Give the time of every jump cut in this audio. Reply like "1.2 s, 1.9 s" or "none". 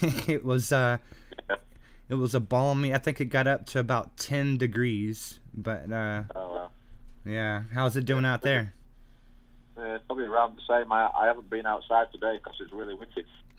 none